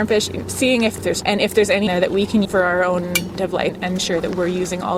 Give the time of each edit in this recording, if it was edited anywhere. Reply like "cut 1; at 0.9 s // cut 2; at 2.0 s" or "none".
cut 1; at 1.2 s // cut 2; at 1.9 s // cut 3; at 2.4 s // cut 4; at 3.4 s // cut 5; at 4.0 s